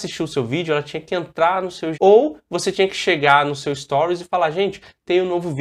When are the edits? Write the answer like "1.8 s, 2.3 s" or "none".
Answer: 1.9 s